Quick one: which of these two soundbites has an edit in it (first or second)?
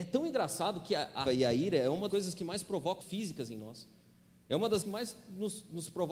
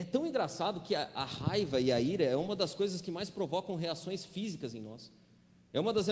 first